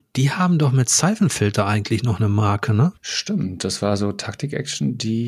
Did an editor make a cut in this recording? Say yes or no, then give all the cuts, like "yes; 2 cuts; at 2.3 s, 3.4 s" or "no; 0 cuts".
yes; 1 cut; at 3.0 s